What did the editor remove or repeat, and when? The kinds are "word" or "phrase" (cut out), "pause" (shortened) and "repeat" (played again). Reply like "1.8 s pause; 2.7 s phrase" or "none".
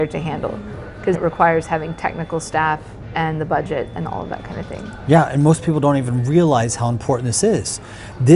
1.1 s word